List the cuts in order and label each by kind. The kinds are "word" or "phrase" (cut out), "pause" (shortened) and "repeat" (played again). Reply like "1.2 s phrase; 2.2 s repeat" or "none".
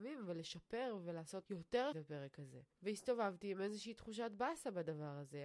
1.4 s word; 1.9 s word; 2.7 s pause